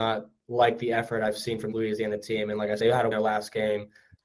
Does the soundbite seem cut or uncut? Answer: cut